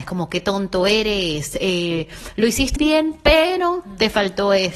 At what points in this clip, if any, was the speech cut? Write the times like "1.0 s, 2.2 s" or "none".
2.8 s

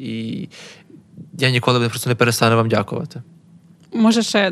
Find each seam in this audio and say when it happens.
none

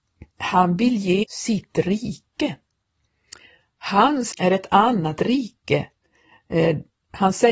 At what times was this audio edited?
1.2 s, 4.3 s

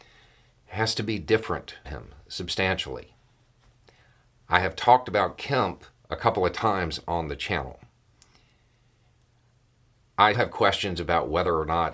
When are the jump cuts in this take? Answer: 1.8 s, 6.0 s, 10.3 s

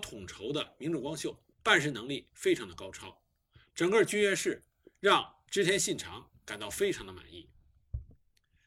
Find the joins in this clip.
1.5 s

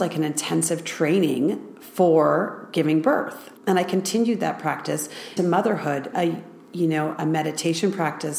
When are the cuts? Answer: 3.6 s, 5.4 s, 6.1 s

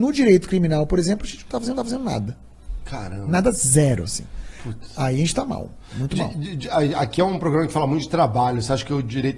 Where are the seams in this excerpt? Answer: 1.7 s

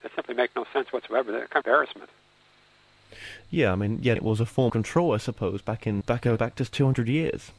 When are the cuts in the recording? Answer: 1.6 s, 4.2 s, 4.7 s, 6.0 s, 6.4 s

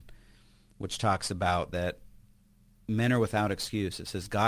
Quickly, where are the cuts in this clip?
none

